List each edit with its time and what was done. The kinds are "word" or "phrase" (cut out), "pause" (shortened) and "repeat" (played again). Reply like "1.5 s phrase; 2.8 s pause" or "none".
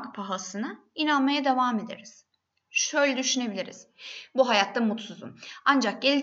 none